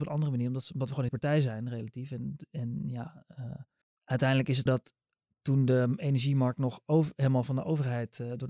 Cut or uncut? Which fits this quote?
cut